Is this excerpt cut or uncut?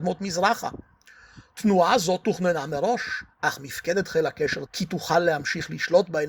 cut